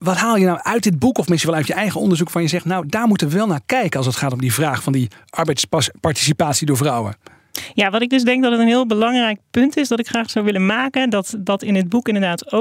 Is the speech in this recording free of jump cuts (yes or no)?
yes